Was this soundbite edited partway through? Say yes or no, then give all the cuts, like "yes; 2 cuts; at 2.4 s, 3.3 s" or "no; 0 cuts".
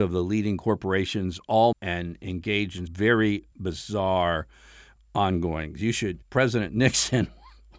yes; 4 cuts; at 1.7 s, 2.9 s, 3.5 s, 6.2 s